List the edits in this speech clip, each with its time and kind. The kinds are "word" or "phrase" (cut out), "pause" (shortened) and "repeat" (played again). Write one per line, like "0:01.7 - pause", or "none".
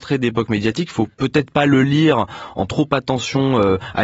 0:01.1 - pause
0:02.7 - word